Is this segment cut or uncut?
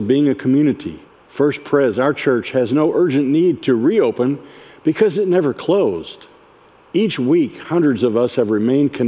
cut